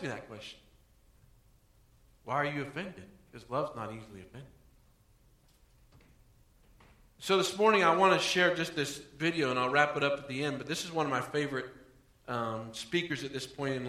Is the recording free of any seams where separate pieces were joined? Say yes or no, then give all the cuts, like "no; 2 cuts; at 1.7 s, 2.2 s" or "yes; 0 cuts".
yes; 0 cuts